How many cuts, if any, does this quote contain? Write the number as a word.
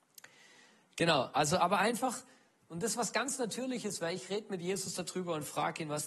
zero